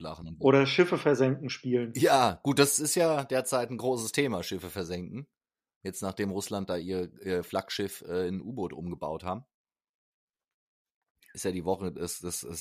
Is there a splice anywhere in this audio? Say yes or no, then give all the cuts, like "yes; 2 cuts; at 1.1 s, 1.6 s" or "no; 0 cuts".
no; 0 cuts